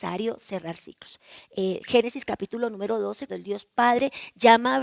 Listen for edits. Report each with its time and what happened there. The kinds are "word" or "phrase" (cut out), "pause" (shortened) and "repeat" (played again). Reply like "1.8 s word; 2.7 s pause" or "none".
3.3 s word